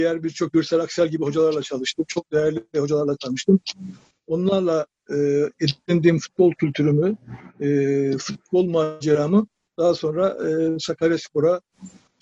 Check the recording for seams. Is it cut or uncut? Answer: uncut